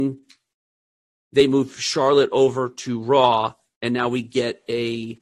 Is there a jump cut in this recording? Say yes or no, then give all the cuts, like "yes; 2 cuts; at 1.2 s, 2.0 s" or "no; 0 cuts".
no; 0 cuts